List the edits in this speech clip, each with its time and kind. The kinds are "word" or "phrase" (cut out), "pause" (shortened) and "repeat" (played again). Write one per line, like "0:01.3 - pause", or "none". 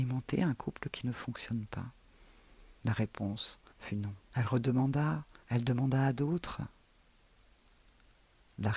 0:02.8 - pause
0:03.7 - pause
0:04.2 - pause
0:05.4 - pause